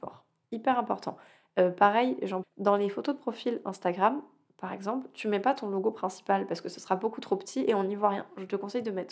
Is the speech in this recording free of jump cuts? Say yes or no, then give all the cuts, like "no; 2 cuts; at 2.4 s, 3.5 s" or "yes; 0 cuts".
no; 1 cut; at 2.4 s